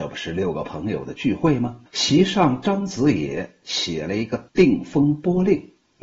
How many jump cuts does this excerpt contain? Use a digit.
2